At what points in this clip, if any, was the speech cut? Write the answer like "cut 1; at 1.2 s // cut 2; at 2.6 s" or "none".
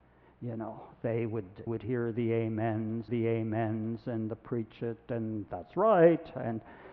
cut 1; at 1.7 s // cut 2; at 3.1 s